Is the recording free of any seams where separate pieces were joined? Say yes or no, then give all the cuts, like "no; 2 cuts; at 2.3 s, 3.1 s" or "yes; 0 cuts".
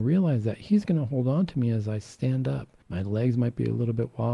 no; 1 cut; at 2.8 s